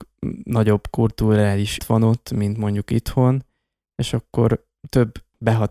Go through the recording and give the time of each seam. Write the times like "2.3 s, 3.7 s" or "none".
1.8 s